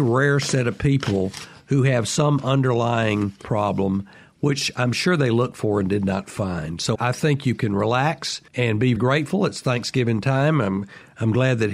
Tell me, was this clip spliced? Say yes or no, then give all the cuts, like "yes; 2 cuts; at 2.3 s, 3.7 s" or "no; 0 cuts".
yes; 4 cuts; at 3.4 s, 6.9 s, 8.5 s, 9.0 s